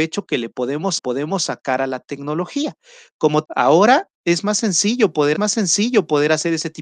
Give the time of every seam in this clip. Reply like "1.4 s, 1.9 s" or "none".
1.0 s, 3.4 s, 5.3 s